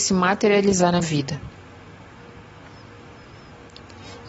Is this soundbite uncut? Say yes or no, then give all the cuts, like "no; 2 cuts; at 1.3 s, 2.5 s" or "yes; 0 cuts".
no; 1 cut; at 1.0 s